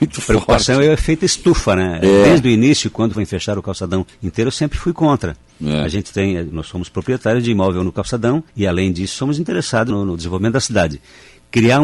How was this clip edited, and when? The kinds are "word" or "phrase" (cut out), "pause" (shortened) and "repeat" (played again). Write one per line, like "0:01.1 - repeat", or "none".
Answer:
0:03.1 - word
0:04.1 - pause
0:08.5 - pause
0:09.9 - word